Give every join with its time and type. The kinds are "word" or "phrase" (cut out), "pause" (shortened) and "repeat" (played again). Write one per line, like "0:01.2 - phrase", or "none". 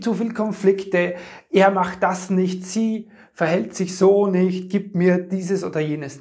none